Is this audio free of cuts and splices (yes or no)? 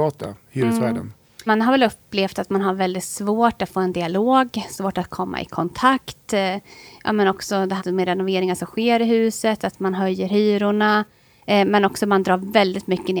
no